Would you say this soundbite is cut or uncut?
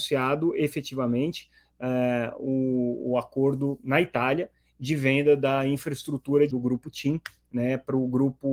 cut